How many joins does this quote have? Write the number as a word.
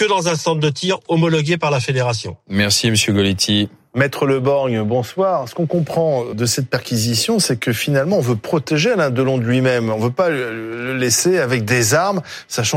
one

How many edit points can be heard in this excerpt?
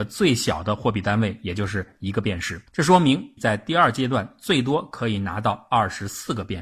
two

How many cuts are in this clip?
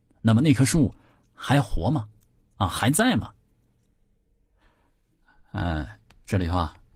zero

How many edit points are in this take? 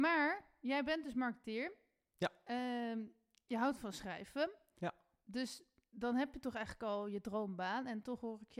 zero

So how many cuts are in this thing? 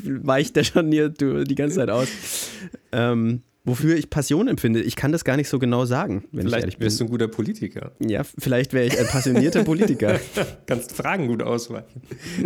two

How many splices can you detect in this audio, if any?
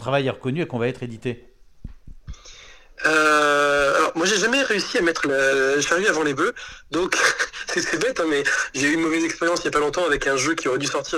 zero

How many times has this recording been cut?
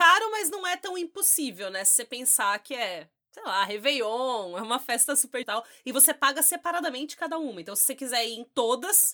one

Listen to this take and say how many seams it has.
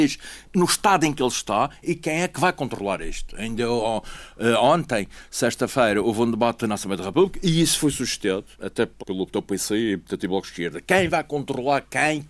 two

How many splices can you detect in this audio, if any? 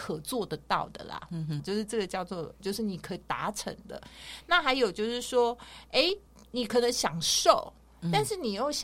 three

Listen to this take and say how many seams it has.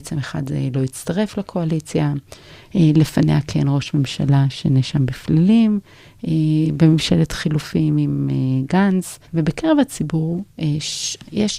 one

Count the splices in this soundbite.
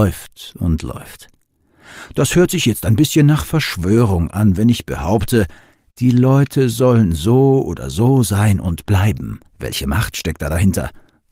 one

